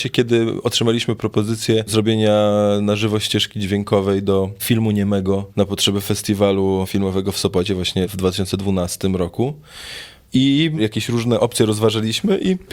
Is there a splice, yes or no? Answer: no